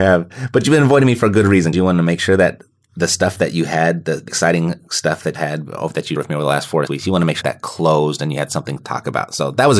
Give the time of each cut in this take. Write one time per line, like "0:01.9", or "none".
0:01.7
0:04.3
0:05.3
0:06.2
0:06.9
0:07.4
0:08.8